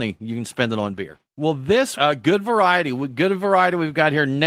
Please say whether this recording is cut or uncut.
cut